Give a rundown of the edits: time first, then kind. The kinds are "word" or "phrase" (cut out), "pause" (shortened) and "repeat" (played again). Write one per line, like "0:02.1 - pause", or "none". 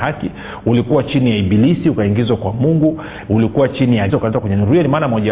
0:04.1 - word